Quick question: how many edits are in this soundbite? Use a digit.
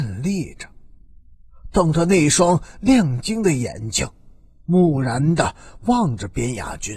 0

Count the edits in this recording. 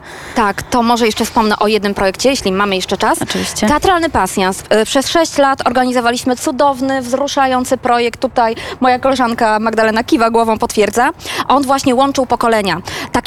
0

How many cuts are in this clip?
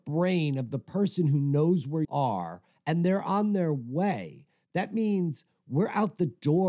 1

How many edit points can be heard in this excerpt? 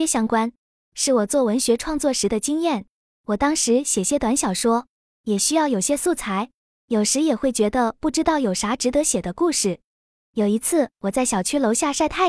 1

